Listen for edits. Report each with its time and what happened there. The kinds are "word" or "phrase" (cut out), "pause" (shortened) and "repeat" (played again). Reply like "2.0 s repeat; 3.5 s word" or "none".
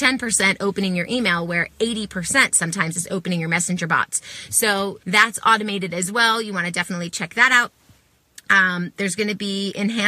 5.0 s pause